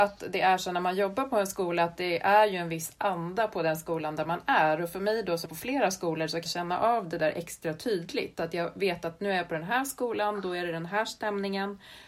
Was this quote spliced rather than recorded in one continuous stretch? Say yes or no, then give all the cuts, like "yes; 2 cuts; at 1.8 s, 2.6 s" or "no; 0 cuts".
yes; 2 cuts; at 5.5 s, 6.5 s